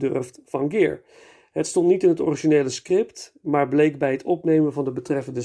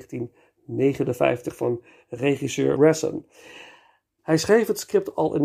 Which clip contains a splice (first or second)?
second